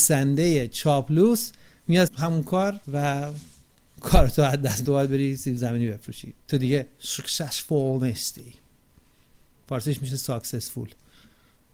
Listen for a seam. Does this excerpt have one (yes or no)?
yes